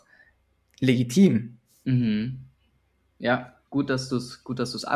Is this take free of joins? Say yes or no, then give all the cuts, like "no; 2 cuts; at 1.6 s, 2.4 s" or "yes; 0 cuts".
no; 1 cut; at 3.7 s